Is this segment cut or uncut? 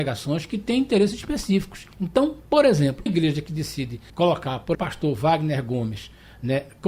cut